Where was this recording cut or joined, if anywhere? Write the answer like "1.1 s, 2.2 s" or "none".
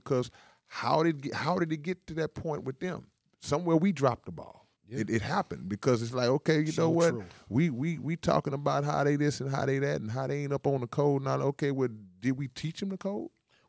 3.2 s, 4.8 s